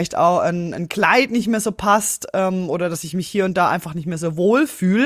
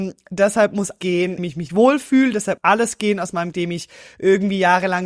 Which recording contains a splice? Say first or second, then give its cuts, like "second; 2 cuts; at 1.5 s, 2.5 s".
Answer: second; 5 cuts; at 1.0 s, 1.4 s, 1.7 s, 2.6 s, 3.5 s